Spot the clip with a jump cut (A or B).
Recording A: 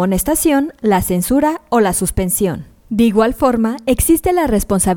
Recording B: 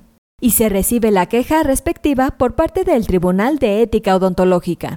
A